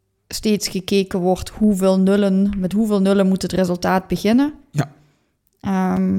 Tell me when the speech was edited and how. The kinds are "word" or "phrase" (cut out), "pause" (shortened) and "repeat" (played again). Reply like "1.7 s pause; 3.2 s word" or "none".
none